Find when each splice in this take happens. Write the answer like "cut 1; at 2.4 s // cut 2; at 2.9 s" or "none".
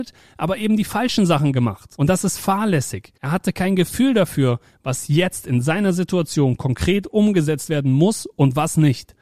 cut 1; at 3.2 s